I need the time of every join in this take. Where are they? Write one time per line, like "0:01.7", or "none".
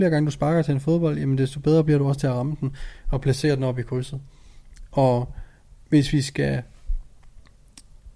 none